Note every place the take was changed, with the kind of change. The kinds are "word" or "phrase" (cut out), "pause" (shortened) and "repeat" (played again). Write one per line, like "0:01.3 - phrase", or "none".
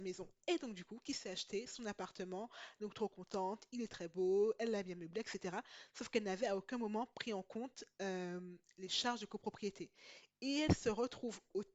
none